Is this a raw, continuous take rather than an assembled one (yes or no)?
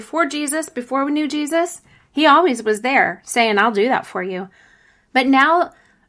yes